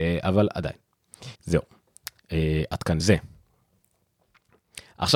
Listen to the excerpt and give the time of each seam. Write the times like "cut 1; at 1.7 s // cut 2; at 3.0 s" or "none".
cut 1; at 1.4 s // cut 2; at 3.0 s